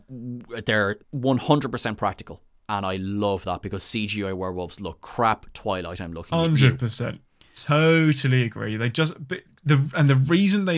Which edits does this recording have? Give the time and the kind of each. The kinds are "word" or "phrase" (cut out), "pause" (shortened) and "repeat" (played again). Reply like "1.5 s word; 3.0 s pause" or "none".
1.0 s pause